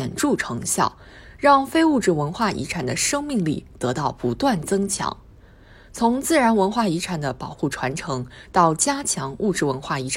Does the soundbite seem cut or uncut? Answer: uncut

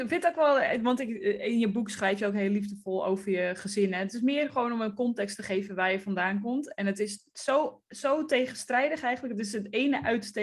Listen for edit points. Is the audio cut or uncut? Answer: uncut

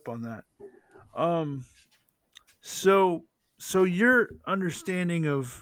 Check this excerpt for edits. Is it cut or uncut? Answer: uncut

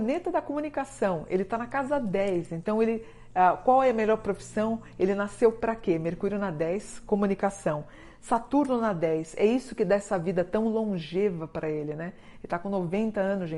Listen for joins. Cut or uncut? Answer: uncut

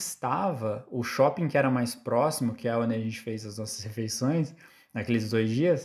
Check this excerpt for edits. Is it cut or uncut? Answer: uncut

